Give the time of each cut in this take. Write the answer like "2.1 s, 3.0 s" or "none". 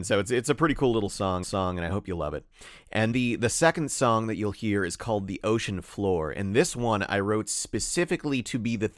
1.4 s, 3.1 s